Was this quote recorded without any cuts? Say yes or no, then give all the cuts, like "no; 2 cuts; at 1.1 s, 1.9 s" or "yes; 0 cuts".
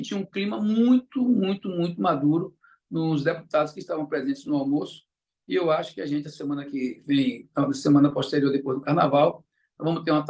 yes; 0 cuts